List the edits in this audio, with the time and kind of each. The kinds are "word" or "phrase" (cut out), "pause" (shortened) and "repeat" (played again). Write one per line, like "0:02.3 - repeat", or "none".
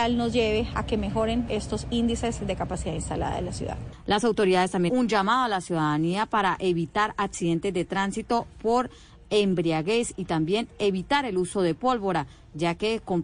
0:01.5 - word
0:04.9 - word